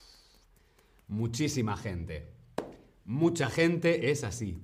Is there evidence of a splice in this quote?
no; 0 cuts

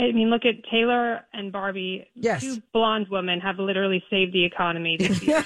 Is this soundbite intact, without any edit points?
yes; 0 cuts

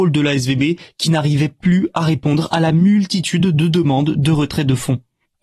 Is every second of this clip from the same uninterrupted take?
yes; 0 cuts

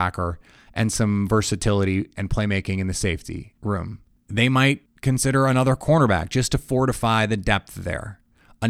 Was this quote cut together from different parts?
no; 0 cuts

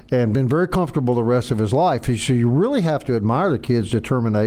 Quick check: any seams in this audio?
no; 0 cuts

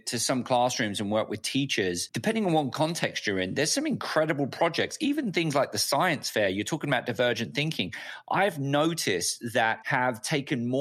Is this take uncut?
no; 1 cut; at 9.8 s

